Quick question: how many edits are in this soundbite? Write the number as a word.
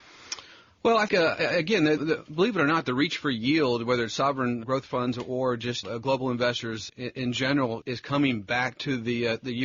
six